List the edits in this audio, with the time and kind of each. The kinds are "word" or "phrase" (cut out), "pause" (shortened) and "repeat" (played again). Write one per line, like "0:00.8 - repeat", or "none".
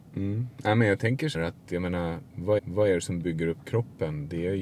0:01.3 - word
0:02.6 - repeat